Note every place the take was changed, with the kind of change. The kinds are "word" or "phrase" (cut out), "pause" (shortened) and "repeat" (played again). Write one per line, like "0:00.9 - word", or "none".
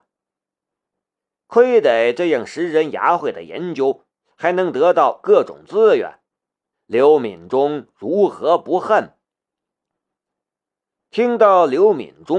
none

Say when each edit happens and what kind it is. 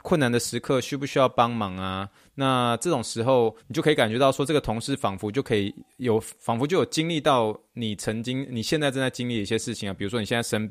0:03.6 - pause

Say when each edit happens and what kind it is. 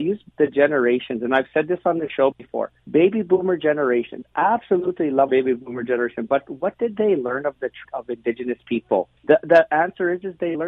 0:02.8 - pause
0:05.3 - word
0:07.8 - word
0:09.2 - pause

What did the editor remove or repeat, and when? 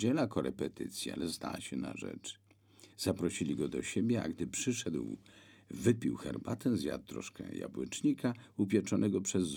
0:02.9 - pause

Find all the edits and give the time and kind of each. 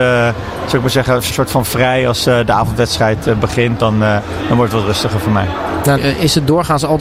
0:01.3 - word
0:06.0 - word

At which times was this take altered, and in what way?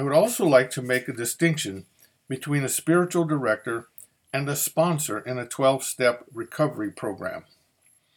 none

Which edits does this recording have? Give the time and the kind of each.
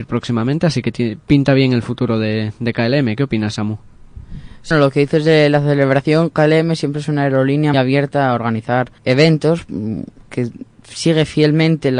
0:04.7 - word
0:07.7 - word
0:09.0 - pause

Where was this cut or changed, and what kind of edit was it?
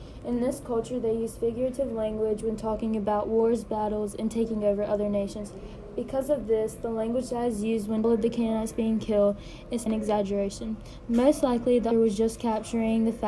0:08.0 - phrase
0:09.9 - word
0:11.9 - word

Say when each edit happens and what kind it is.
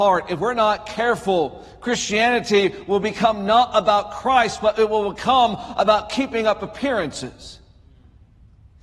none

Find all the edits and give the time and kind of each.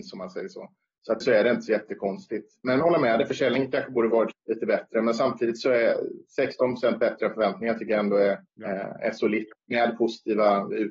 0:01.2 - word
0:02.8 - phrase
0:04.3 - word
0:08.5 - pause

